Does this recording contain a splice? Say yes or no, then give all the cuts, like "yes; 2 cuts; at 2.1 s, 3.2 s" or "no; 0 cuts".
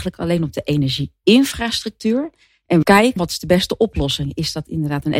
yes; 2 cuts; at 2.8 s, 3.2 s